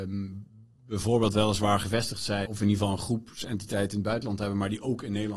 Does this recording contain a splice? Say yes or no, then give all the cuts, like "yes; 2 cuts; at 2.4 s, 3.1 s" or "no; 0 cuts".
yes; 1 cut; at 2.5 s